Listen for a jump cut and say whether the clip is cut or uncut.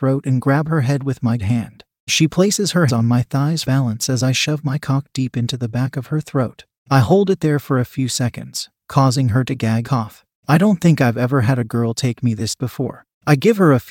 cut